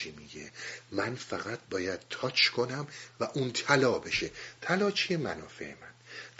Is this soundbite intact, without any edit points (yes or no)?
yes